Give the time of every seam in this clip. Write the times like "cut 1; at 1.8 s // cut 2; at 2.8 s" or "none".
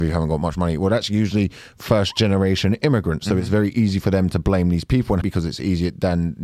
cut 1; at 5.2 s